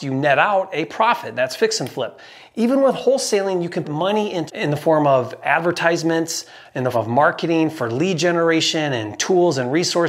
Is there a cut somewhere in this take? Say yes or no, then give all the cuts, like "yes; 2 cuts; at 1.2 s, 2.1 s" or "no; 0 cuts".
yes; 4 cuts; at 3.8 s, 4.5 s, 5.4 s, 6.9 s